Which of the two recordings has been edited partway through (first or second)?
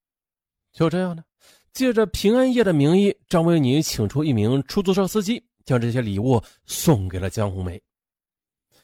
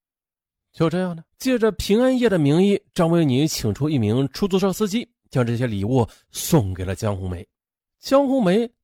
second